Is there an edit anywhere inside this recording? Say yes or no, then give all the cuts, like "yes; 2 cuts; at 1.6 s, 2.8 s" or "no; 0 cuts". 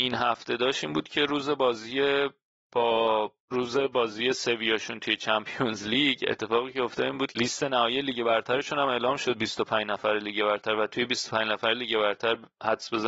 yes; 2 cuts; at 3.4 s, 7.3 s